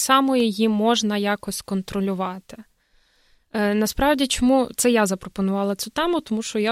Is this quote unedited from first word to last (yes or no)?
yes